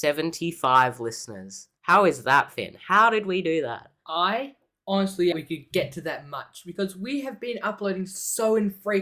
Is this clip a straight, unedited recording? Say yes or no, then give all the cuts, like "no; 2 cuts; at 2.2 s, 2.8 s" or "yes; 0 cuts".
no; 2 cuts; at 1.8 s, 5.3 s